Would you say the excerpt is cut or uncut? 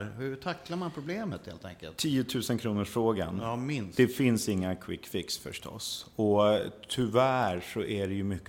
uncut